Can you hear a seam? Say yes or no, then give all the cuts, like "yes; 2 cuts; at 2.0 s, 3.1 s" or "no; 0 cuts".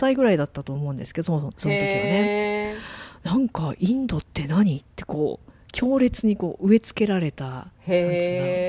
yes; 2 cuts; at 4.9 s, 7.8 s